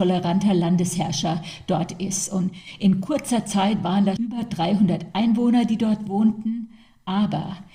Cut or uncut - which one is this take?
cut